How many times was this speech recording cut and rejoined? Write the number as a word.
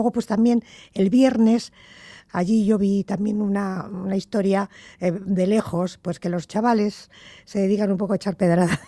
zero